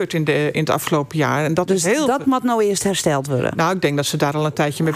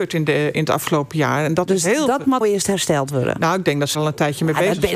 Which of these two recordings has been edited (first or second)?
second